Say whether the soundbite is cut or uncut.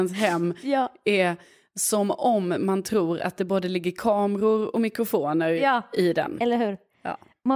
uncut